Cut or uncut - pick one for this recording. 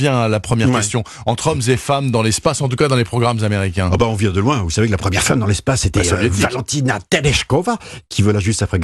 uncut